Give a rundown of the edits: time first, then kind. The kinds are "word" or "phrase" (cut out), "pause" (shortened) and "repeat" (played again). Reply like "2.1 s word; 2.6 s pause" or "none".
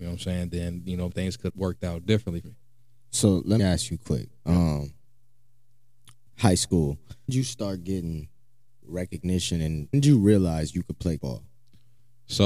1.1 s word; 1.5 s word; 2.4 s word; 3.6 s word; 7.3 s word; 8.8 s word; 9.9 s word; 11.2 s word